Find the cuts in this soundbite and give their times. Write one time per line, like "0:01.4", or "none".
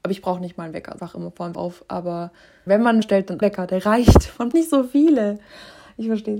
0:01.0
0:01.5
0:02.7
0:03.0
0:03.4
0:04.5